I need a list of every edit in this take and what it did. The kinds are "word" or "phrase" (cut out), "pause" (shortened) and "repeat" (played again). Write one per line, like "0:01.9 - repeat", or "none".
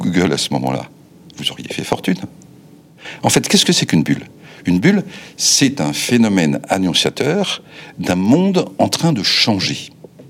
none